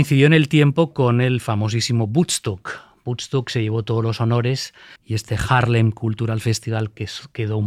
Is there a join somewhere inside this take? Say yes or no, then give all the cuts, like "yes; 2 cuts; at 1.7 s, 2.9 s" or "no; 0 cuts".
yes; 1 cut; at 5.0 s